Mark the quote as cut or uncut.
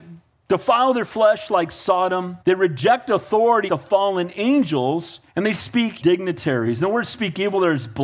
cut